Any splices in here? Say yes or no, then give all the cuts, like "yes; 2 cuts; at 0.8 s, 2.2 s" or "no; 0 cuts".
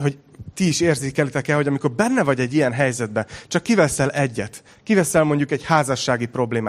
no; 0 cuts